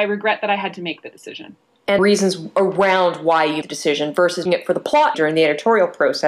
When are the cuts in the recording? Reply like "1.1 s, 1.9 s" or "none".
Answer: 2.0 s, 3.6 s, 4.5 s, 5.1 s